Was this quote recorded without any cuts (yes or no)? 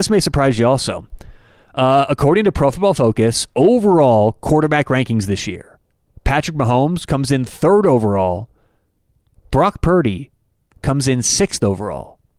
yes